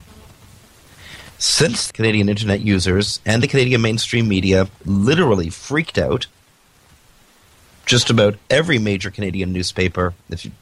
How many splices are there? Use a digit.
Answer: 1